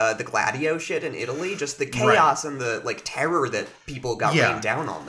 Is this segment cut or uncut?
uncut